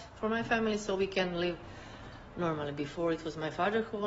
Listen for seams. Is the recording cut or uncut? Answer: uncut